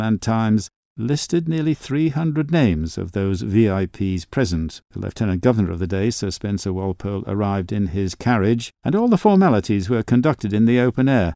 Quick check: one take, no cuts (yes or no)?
no